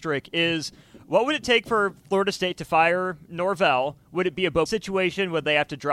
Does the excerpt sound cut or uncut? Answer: cut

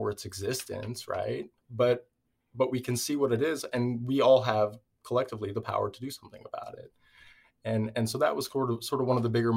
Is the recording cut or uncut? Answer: cut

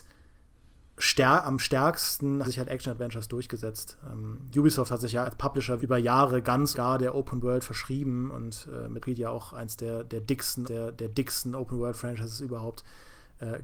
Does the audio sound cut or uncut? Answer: cut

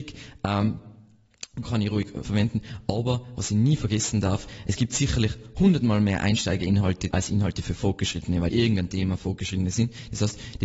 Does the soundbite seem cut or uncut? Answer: cut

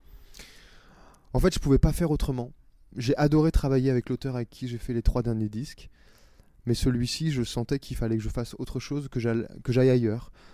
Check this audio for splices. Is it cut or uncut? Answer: uncut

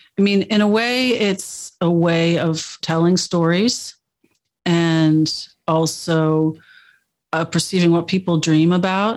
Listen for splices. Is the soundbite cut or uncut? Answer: uncut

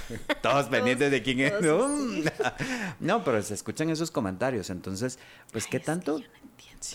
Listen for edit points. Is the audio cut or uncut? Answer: uncut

